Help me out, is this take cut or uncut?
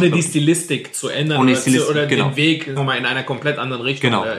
cut